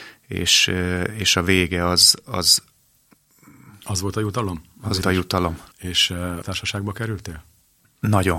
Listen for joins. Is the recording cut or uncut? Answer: cut